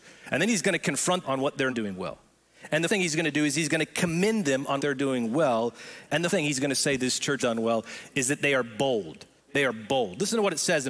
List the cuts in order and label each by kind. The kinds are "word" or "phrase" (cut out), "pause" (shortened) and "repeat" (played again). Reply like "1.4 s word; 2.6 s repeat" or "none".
1.2 s word; 1.7 s word; 2.9 s word; 4.8 s word; 6.3 s word; 7.4 s word